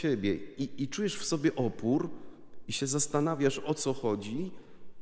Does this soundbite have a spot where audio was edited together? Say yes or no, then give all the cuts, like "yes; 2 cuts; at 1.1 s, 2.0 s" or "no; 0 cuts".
no; 0 cuts